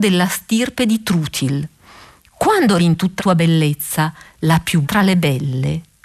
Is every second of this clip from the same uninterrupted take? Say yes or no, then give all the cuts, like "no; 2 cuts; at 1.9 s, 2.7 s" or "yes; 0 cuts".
no; 3 cuts; at 2.8 s, 3.2 s, 4.8 s